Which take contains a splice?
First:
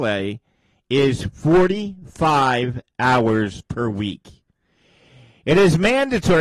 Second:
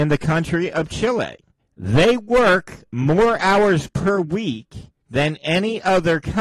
second; 2 cuts; at 1.6 s, 5.0 s

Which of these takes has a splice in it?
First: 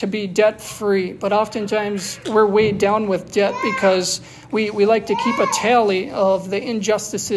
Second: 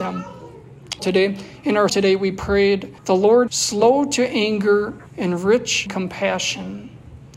second; 6 cuts; at 1.0 s, 1.9 s, 3.0 s, 3.5 s, 5.1 s, 5.9 s

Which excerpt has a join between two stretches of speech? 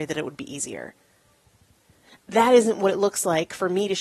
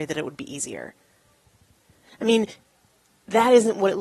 first; 1 cut; at 2.2 s

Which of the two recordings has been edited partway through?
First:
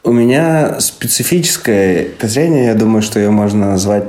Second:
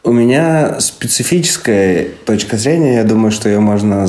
first; 1 cut; at 2.2 s

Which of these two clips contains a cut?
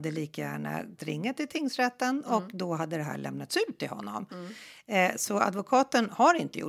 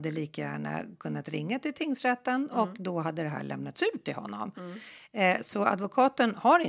first; 1 cut; at 1.0 s

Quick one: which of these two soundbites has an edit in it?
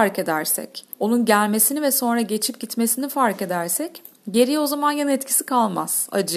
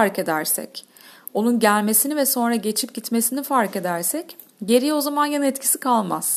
first; 1 cut; at 0.9 s

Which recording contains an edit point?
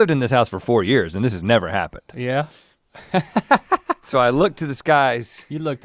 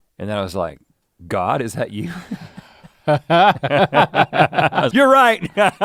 second; 1 cut; at 4.9 s

